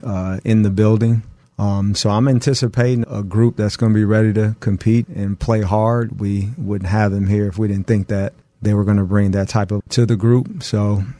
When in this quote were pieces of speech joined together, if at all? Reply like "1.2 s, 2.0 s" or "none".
3.0 s, 5.0 s, 9.8 s